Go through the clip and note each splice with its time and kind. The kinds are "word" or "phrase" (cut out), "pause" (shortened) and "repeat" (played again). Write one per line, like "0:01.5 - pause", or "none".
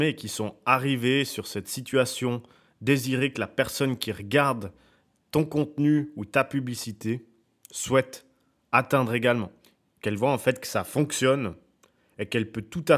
none